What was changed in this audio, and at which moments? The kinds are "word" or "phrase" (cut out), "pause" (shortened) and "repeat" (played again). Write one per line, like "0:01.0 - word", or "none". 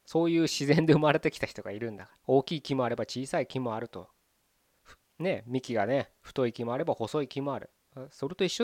0:02.2 - pause